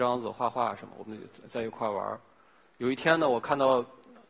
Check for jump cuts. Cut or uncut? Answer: uncut